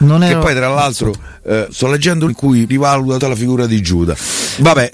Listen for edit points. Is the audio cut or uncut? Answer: cut